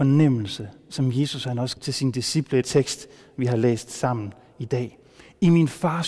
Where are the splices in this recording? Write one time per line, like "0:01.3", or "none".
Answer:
0:01.8
0:02.6